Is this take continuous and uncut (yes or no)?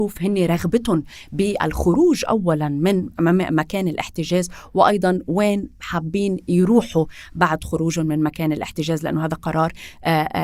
yes